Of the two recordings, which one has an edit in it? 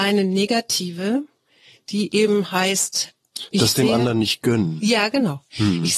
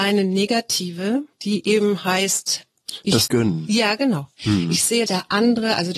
second; 3 cuts; at 1.3 s, 3.3 s, 5.1 s

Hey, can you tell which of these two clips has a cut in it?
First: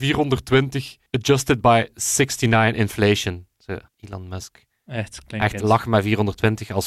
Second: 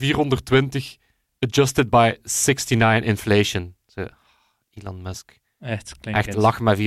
first; 2 cuts; at 1.1 s, 3.9 s

